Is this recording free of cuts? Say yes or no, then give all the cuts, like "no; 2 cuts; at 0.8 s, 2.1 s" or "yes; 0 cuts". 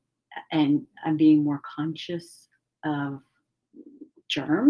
yes; 0 cuts